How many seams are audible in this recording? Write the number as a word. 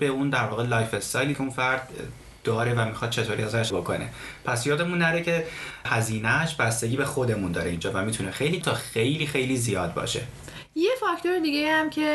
three